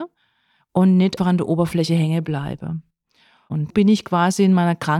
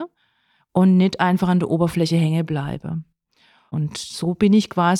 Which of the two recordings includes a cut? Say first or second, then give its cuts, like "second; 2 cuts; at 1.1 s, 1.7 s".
first; 2 cuts; at 1.2 s, 3.7 s